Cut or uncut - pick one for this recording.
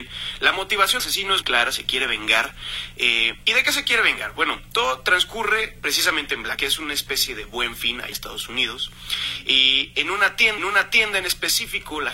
cut